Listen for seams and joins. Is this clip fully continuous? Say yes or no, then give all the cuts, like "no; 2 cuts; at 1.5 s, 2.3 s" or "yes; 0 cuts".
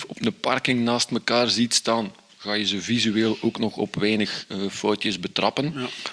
yes; 0 cuts